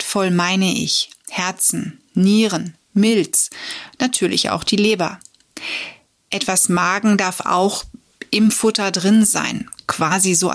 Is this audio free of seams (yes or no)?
yes